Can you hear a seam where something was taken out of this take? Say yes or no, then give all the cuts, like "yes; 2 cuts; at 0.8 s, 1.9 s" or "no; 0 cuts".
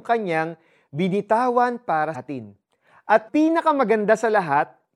yes; 2 cuts; at 2.1 s, 3.3 s